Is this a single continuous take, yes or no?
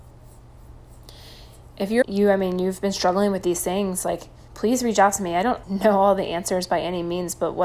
no